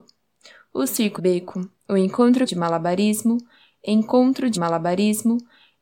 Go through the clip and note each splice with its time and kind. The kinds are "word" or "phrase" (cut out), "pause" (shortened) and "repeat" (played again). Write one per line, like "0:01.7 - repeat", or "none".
0:01.2 - word
0:02.5 - word
0:04.5 - repeat